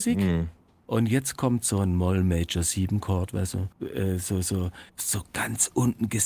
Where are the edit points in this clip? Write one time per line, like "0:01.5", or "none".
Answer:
0:03.7
0:04.9